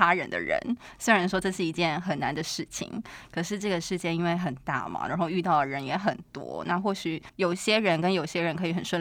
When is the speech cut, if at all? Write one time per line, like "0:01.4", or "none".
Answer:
0:07.3